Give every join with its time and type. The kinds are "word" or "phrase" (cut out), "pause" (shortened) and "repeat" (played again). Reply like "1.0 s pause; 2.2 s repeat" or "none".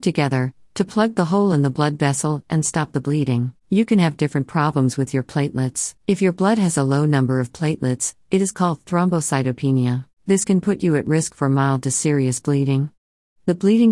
3.6 s pause; 6.0 s pause; 10.1 s pause